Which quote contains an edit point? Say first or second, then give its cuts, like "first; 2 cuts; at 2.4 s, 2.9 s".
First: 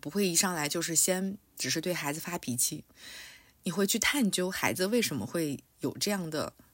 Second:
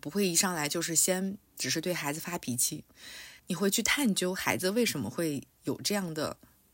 second; 1 cut; at 3.4 s